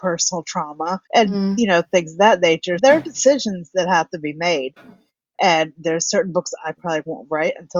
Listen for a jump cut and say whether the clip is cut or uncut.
cut